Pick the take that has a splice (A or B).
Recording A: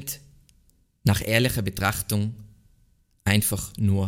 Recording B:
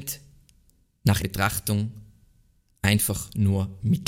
B